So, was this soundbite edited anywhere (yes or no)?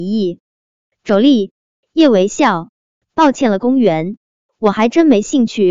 no